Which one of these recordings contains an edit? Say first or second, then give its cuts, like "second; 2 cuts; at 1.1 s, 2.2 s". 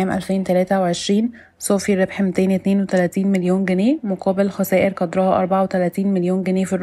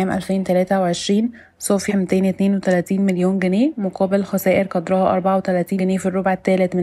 second; 2 cuts; at 1.9 s, 5.8 s